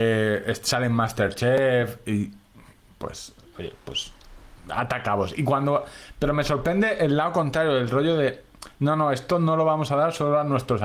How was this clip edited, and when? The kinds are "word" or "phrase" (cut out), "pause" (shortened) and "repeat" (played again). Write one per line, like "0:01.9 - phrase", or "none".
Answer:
none